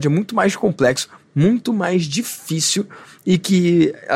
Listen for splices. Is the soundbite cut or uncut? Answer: uncut